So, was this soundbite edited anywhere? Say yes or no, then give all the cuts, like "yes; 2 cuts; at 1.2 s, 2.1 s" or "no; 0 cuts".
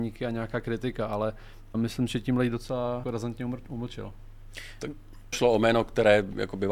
yes; 3 cuts; at 1.7 s, 3.0 s, 5.3 s